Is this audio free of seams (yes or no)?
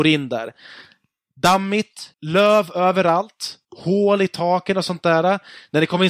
no